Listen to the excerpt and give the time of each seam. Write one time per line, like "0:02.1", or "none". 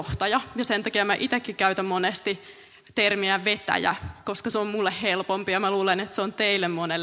none